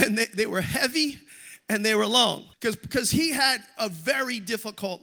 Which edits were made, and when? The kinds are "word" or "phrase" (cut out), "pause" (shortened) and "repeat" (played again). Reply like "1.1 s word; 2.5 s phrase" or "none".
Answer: 2.5 s pause